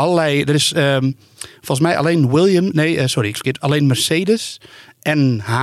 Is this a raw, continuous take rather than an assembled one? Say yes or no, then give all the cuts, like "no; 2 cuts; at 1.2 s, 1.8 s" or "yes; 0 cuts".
no; 1 cut; at 3.3 s